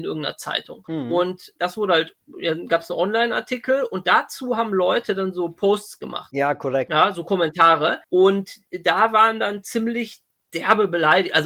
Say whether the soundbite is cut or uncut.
uncut